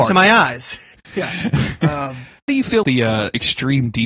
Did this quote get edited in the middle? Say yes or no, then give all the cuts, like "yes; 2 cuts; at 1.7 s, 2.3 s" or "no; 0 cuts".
yes; 2 cuts; at 2.5 s, 2.8 s